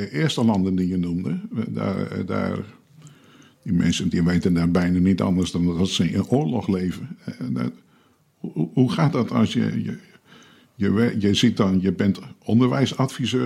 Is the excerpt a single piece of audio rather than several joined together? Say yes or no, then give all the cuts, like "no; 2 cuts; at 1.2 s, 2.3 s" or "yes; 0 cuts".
yes; 0 cuts